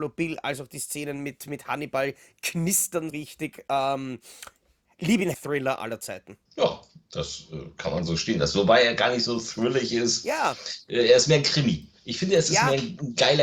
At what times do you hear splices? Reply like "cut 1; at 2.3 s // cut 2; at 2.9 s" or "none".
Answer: cut 1; at 3.1 s // cut 2; at 5.3 s // cut 3; at 6.5 s